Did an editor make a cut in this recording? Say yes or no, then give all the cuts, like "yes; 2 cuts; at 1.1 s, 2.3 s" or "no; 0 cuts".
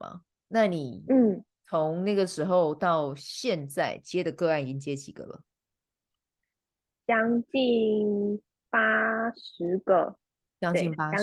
no; 0 cuts